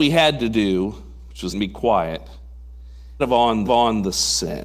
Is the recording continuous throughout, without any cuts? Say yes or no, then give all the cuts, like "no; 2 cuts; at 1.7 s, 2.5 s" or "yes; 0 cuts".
no; 3 cuts; at 1.5 s, 3.2 s, 3.6 s